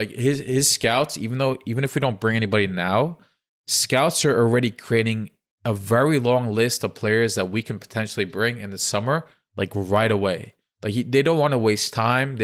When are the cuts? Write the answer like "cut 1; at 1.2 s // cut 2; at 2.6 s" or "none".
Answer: none